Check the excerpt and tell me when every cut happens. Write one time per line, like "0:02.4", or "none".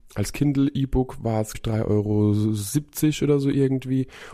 0:01.5

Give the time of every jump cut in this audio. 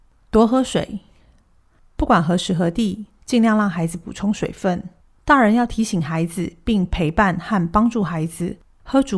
0:05.0

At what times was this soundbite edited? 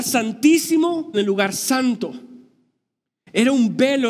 0:01.1

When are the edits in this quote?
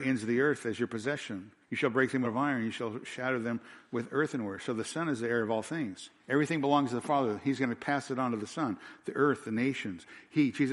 0:01.6
0:02.2
0:06.2

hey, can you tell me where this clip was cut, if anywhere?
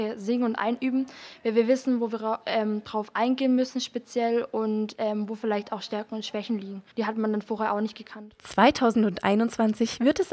0:06.9

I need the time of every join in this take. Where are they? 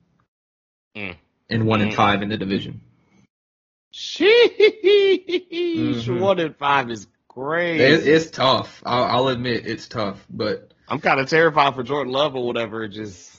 none

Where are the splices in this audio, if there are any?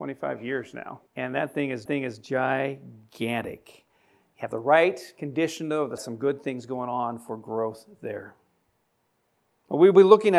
0:01.1
0:01.9
0:06.0

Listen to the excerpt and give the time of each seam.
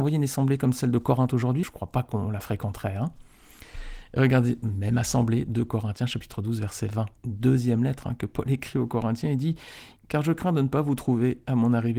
0:01.6
0:07.2
0:10.0

